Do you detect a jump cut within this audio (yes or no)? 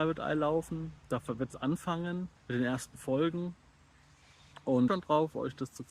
yes